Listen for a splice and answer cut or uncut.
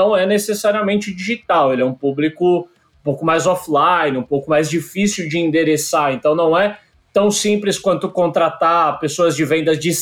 uncut